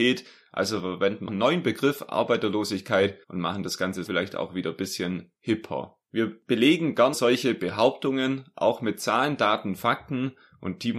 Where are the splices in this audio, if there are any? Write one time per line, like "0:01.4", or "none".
0:01.3
0:03.2
0:04.1
0:06.1
0:07.1

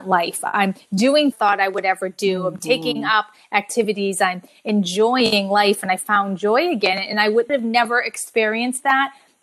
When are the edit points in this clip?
0:01.3

